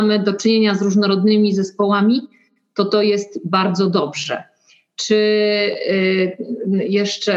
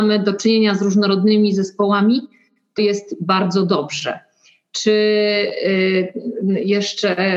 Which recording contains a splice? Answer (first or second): second